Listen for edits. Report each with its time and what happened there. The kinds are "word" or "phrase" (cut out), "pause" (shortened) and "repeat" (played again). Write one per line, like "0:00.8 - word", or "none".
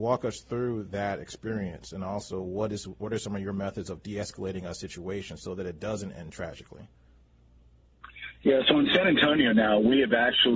none